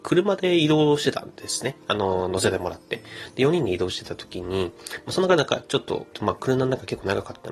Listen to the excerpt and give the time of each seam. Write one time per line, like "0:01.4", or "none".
0:06.1